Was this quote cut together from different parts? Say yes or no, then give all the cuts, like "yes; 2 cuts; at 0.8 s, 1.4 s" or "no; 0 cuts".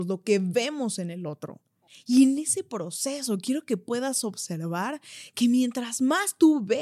yes; 1 cut; at 1.9 s